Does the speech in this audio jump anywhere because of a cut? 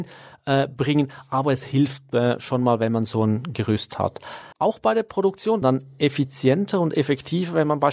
yes; 2 cuts; at 4.5 s, 5.6 s

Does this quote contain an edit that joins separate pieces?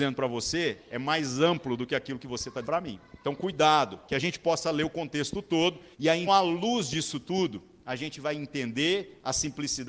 yes; 4 cuts; at 2.6 s, 3.2 s, 5.9 s, 6.3 s

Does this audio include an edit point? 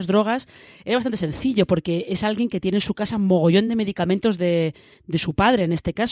no; 0 cuts

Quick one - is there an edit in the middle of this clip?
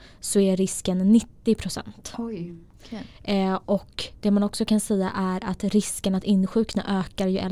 no; 0 cuts

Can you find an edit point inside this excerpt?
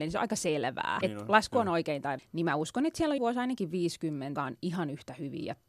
yes; 4 cuts; at 1.0 s, 2.2 s, 3.2 s, 4.4 s

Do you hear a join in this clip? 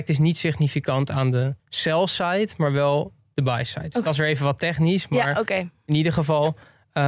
yes; 1 cut; at 1.6 s

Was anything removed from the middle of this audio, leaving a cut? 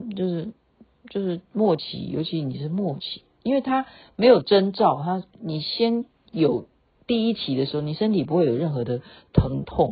no; 0 cuts

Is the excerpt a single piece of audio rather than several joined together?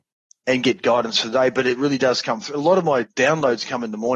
no; 1 cut; at 3.1 s

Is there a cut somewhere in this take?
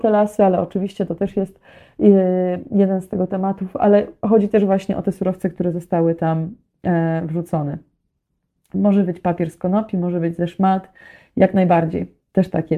no; 0 cuts

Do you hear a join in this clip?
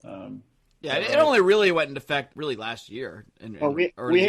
yes; 1 cut; at 2.3 s

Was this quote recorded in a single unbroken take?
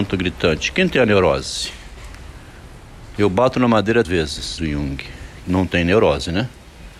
no; 3 cuts; at 4.0 s, 4.6 s, 5.4 s

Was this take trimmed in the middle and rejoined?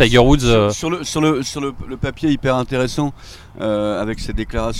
no; 0 cuts

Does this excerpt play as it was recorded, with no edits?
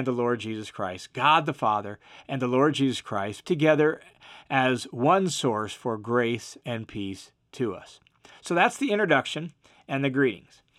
no; 1 cut; at 3.4 s

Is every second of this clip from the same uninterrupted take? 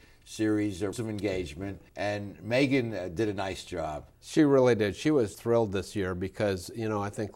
no; 4 cuts; at 0.9 s, 1.9 s, 4.1 s, 5.3 s

